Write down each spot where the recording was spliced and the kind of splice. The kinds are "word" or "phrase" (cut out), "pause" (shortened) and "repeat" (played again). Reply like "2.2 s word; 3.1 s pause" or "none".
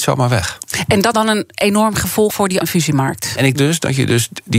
1.1 s word; 2.3 s word; 2.6 s word; 3.5 s word